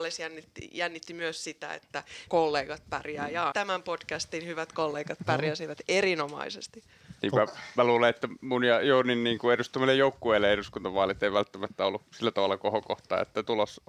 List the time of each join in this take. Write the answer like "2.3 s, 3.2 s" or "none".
2.3 s, 3.5 s, 7.2 s